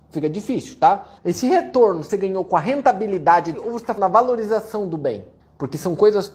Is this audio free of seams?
no; 5 cuts; at 1.2 s, 2.1 s, 3.5 s, 4.0 s, 5.4 s

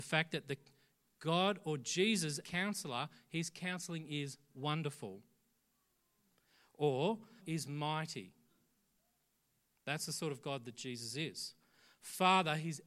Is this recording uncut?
no; 2 cuts; at 2.4 s, 7.4 s

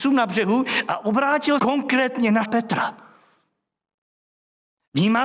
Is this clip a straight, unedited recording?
no; 2 cuts; at 1.6 s, 2.4 s

